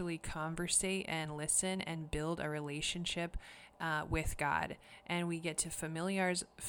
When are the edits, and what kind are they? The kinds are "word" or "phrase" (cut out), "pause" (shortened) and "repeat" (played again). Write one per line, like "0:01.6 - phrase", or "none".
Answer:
none